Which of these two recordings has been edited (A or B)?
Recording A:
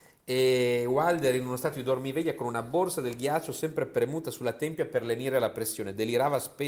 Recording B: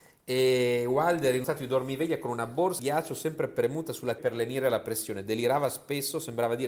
B